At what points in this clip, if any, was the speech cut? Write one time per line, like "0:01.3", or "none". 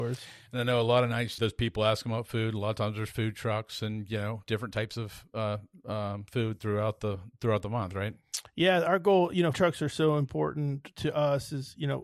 0:01.4
0:09.5